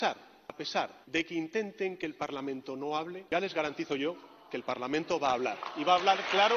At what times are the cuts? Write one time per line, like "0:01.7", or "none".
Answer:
0:01.0
0:03.3

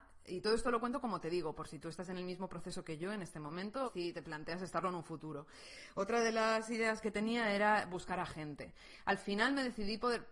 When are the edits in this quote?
0:03.9
0:07.0

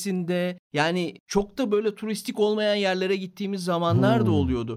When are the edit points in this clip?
none

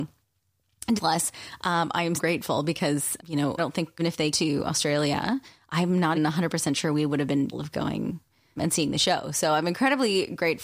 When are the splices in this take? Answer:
0:01.0
0:02.2
0:03.2
0:03.6
0:04.0
0:04.3
0:06.1
0:07.5
0:08.6

